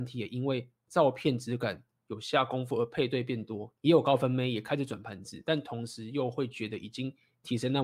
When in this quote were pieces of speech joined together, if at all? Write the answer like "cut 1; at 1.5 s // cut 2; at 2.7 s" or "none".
cut 1; at 3.8 s